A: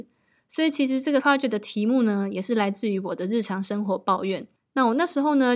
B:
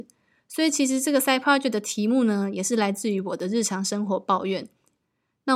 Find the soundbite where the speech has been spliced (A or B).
A